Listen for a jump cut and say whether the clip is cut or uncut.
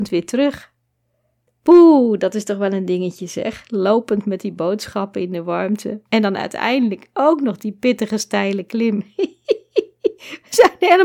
cut